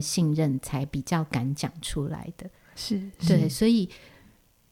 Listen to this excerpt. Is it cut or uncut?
uncut